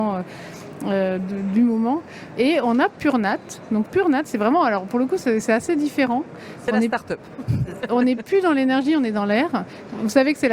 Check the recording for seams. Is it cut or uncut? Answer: uncut